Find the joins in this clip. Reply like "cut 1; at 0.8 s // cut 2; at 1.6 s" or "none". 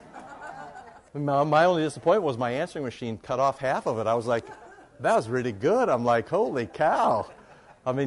cut 1; at 1.1 s